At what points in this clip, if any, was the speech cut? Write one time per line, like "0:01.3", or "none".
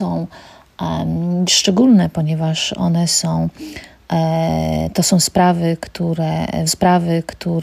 0:01.5
0:06.7